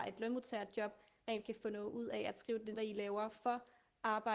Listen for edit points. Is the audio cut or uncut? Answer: cut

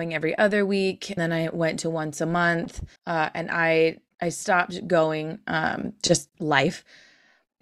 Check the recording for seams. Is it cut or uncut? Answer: cut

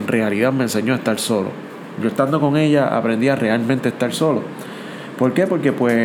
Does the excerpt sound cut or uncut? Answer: uncut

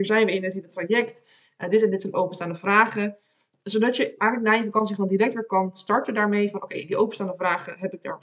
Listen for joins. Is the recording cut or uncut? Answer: uncut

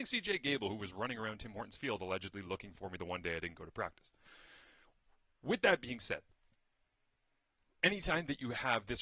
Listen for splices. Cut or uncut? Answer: uncut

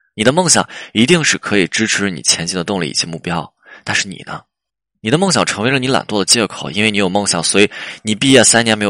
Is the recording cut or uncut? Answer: cut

